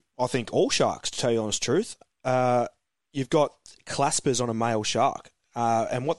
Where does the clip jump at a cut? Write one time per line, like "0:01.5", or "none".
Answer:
none